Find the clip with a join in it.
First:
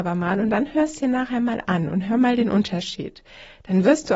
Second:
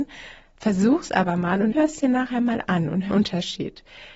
second; 2 cuts; at 1.7 s, 3.1 s

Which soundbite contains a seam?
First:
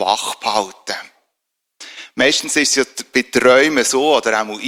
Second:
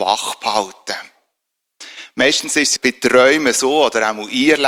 second; 1 cut; at 2.8 s

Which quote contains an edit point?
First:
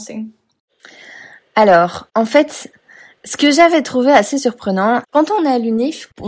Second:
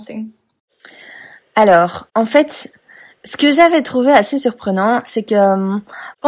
first; 1 cut; at 5.0 s

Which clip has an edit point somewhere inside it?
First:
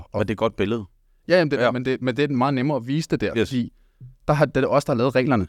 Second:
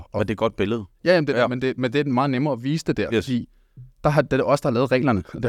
second; 1 cut; at 0.9 s

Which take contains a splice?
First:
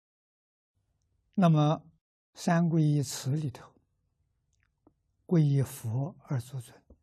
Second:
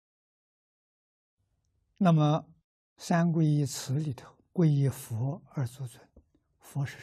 second; 1 cut; at 4.5 s

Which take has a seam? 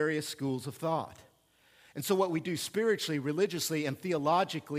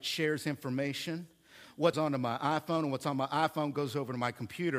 second; 1 cut; at 1.9 s

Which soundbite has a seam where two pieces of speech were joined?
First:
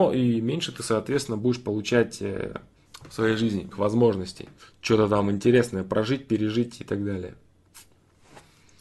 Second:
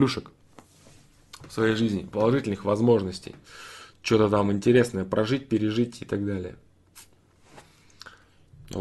first; 3 cuts; at 2.9 s, 3.7 s, 4.6 s

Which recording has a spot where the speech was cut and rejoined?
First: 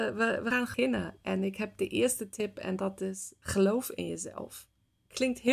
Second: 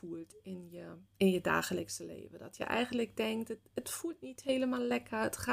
second; 1 cut; at 1.0 s

